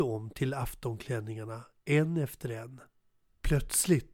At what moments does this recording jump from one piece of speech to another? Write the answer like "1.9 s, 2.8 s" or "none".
3.2 s